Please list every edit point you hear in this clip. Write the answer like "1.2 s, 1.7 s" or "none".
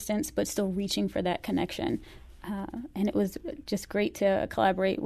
none